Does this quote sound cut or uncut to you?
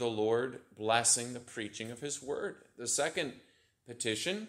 uncut